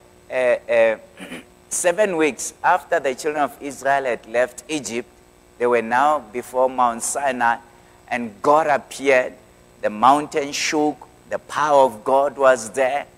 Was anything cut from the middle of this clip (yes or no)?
no